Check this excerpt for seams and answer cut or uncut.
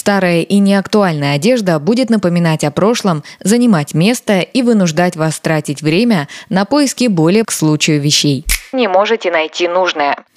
cut